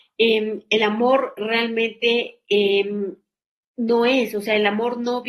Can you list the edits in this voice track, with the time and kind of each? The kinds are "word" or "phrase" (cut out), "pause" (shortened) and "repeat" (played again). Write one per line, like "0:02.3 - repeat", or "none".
none